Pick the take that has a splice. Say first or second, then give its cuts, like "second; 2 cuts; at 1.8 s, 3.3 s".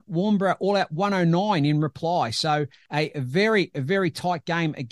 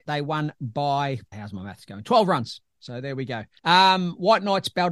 second; 1 cut; at 1.3 s